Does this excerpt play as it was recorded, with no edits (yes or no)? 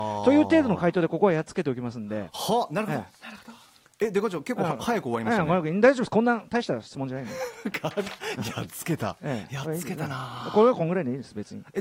yes